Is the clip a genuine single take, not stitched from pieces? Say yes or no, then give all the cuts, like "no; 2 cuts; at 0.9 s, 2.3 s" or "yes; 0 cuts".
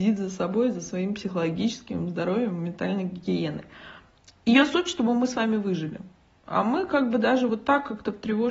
yes; 0 cuts